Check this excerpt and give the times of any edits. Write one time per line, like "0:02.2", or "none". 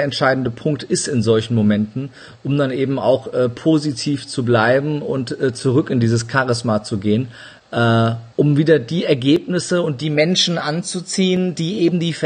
0:08.3

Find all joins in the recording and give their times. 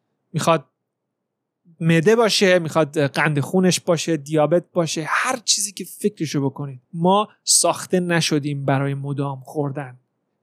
0:06.8

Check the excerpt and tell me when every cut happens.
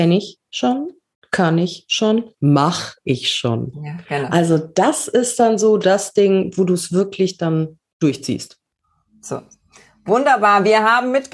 none

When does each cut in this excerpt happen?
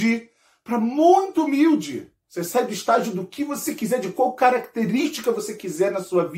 none

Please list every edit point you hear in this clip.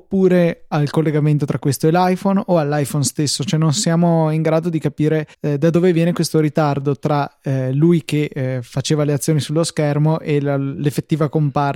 0:05.3

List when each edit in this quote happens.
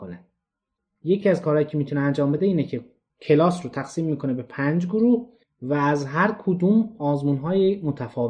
none

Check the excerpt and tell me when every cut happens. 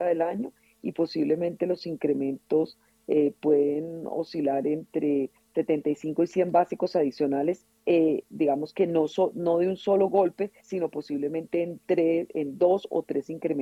0:10.6

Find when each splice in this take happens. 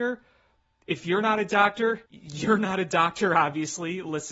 0:02.1

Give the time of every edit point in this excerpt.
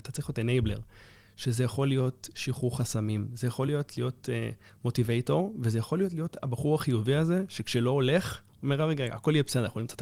none

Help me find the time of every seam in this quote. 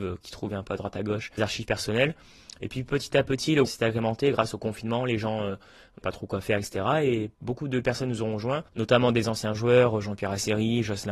0:01.4
0:03.7
0:06.0
0:07.3
0:08.7

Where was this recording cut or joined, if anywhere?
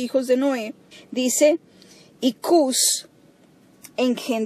0:00.9

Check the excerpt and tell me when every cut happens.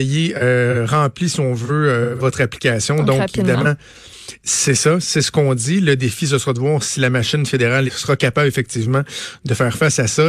0:07.9

